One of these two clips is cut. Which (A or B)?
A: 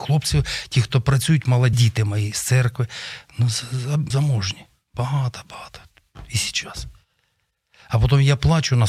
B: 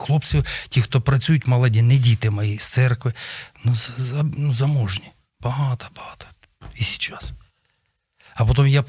A